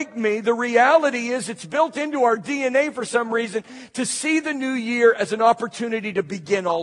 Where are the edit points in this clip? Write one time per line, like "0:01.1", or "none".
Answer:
none